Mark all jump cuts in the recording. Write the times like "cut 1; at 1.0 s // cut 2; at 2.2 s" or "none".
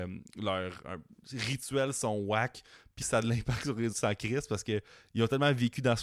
cut 1; at 3.0 s // cut 2; at 3.9 s